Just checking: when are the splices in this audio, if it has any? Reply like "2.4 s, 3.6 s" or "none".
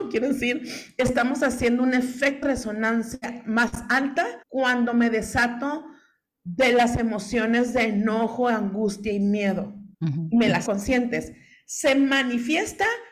2.4 s, 4.4 s, 9.9 s, 10.7 s